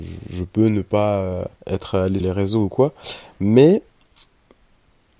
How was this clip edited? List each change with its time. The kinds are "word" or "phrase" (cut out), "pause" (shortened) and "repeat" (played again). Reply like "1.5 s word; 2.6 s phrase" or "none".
1.6 s pause; 2.2 s word